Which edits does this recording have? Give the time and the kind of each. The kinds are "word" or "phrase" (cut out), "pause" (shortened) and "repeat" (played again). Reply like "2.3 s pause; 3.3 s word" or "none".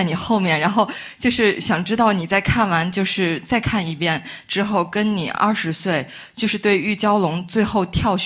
none